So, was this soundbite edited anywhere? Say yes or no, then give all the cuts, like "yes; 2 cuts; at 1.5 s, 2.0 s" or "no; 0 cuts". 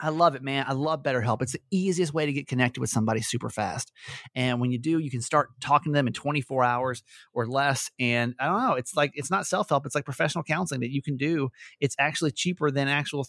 no; 0 cuts